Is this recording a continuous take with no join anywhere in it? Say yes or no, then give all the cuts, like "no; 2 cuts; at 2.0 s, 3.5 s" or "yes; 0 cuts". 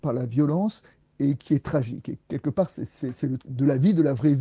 no; 1 cut; at 3.4 s